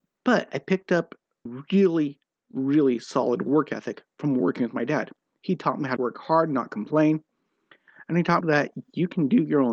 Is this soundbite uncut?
no; 3 cuts; at 1.5 s, 6.0 s, 8.4 s

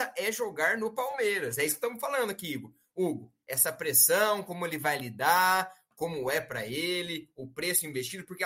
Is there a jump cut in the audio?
no; 0 cuts

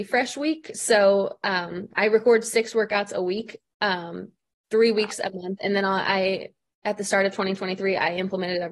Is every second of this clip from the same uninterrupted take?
yes; 0 cuts

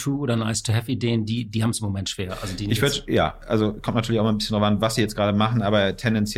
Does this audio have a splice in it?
no; 0 cuts

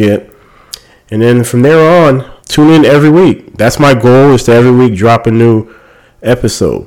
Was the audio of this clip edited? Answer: yes; 1 cut; at 2.4 s

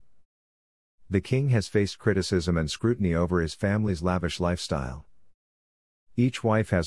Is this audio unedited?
yes; 0 cuts

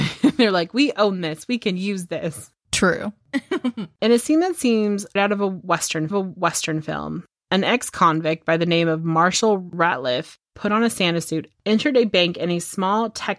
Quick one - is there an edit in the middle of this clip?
yes; 2 cuts; at 5.2 s, 6.1 s

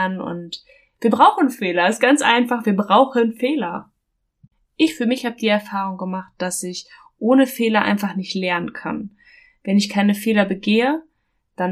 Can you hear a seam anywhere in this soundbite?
no; 0 cuts

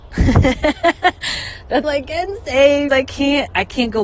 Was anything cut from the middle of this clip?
yes; 2 cuts; at 1.8 s, 2.9 s

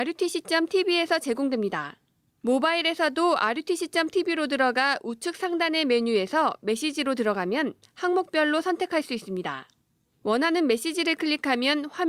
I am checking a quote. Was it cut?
no; 0 cuts

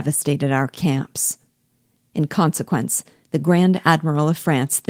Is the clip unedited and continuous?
yes; 0 cuts

